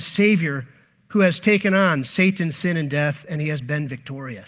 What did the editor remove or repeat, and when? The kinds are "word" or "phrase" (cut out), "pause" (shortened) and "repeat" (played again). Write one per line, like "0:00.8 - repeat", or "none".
none